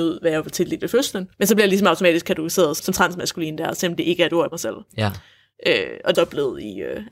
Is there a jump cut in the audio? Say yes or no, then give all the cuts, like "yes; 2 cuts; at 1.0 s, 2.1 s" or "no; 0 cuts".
yes; 4 cuts; at 1.3 s, 2.8 s, 4.5 s, 6.1 s